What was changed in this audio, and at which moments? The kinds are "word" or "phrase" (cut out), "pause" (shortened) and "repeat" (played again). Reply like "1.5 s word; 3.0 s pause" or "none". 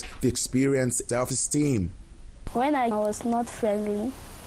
1.1 s phrase; 2.9 s word